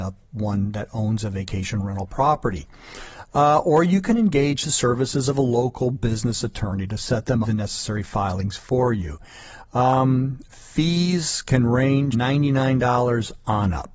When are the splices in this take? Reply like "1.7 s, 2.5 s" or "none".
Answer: 7.4 s, 12.1 s